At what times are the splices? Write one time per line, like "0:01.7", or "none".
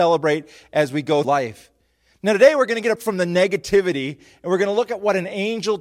0:01.2
0:03.0